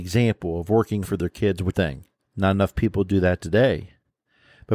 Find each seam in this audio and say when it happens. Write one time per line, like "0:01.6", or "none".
0:01.0
0:01.7
0:02.2